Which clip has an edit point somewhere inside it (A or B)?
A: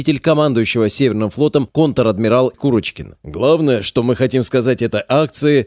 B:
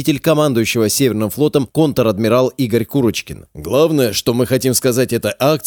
A